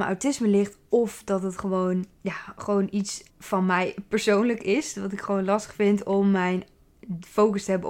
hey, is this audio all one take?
no; 2 cuts; at 2.1 s, 3.3 s

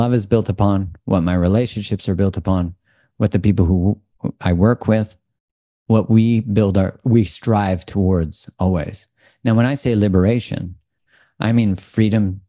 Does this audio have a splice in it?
no; 0 cuts

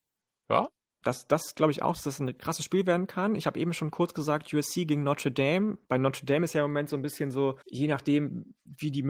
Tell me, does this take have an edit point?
yes; 2 cuts; at 5.8 s, 7.6 s

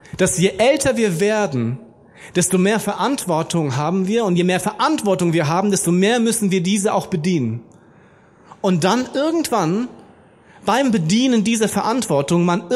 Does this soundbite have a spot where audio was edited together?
no; 0 cuts

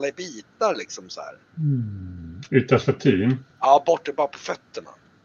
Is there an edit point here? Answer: yes; 1 cut; at 3.5 s

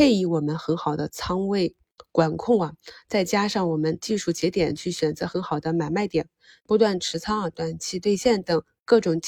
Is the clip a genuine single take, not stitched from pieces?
yes; 0 cuts

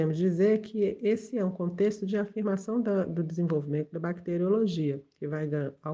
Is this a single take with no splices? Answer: yes; 0 cuts

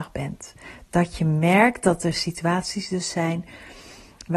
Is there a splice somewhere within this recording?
no; 0 cuts

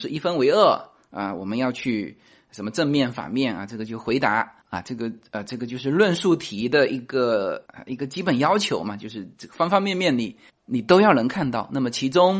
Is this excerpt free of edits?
yes; 0 cuts

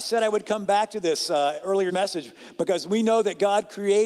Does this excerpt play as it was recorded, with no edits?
no; 1 cut; at 1.9 s

